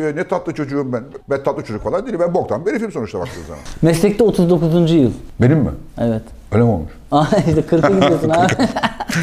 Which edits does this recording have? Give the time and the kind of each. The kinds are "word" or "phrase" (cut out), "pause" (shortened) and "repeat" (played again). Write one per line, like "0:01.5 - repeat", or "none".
none